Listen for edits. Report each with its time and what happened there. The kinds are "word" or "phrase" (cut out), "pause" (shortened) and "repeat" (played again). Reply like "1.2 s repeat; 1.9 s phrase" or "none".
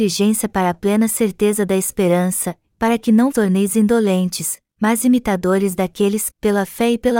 3.3 s word; 6.3 s word